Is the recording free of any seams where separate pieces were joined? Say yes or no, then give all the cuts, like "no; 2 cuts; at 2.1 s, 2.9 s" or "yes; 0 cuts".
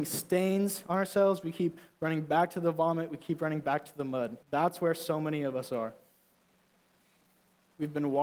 no; 1 cut; at 4.4 s